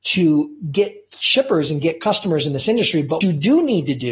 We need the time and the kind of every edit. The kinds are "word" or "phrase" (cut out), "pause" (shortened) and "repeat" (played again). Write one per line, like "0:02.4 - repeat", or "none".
0:03.2 - word